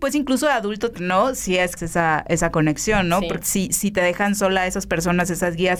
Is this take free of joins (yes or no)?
no